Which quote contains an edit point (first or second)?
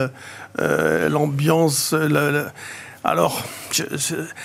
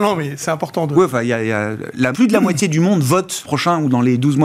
second